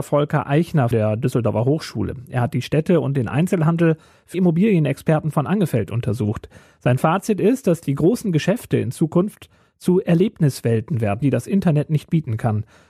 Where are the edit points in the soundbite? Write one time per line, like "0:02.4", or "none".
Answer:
0:00.9
0:04.3
0:11.2